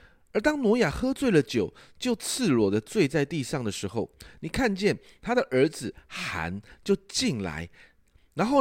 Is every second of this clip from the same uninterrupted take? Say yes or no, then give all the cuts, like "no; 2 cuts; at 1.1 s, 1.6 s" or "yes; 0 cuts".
yes; 0 cuts